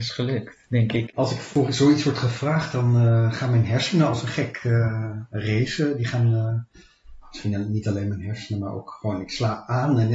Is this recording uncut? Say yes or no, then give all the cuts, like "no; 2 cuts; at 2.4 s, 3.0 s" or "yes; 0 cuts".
yes; 0 cuts